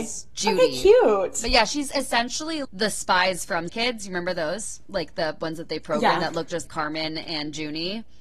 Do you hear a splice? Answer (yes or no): yes